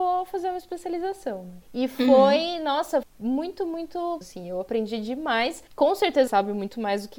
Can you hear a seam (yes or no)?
yes